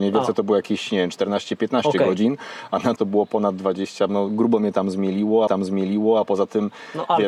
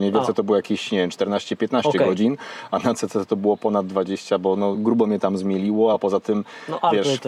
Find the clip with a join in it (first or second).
first